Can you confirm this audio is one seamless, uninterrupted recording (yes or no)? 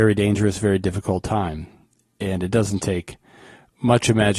yes